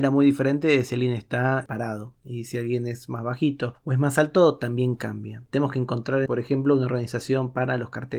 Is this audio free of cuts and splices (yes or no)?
no